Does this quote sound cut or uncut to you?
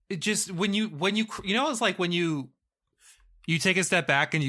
uncut